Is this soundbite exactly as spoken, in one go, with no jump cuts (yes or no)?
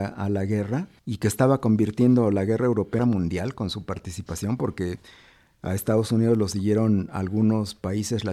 no